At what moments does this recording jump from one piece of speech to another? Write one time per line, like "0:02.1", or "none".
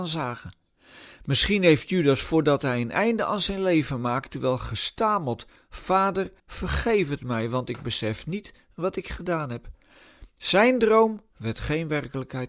0:06.4